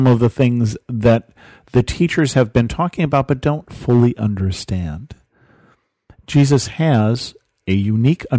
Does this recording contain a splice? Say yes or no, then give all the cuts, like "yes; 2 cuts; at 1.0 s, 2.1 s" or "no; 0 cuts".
no; 0 cuts